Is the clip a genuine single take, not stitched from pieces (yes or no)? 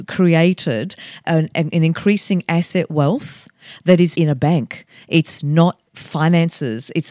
no